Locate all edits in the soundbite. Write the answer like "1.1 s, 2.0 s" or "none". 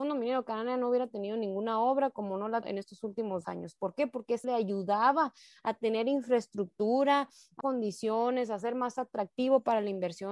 2.6 s, 3.4 s, 4.4 s, 7.6 s